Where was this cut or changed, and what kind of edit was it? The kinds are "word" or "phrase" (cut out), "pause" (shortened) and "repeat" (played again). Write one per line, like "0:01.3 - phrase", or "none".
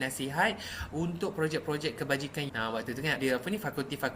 0:02.5 - word
0:03.2 - word